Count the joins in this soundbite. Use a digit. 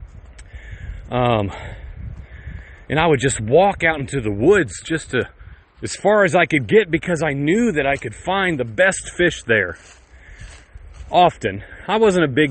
1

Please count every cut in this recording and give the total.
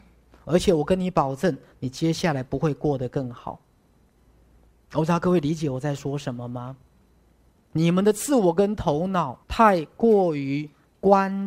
1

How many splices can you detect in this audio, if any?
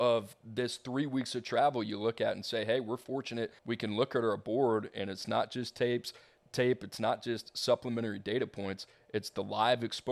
1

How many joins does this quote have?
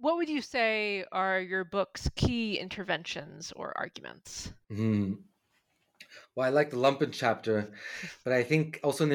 0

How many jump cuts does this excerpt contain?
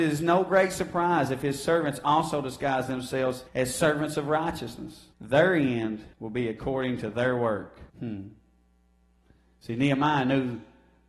4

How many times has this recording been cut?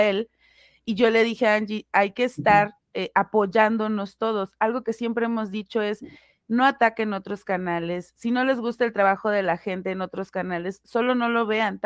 0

